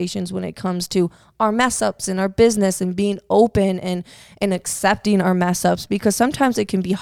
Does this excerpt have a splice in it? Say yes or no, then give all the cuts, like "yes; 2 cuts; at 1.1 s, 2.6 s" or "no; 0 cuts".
no; 0 cuts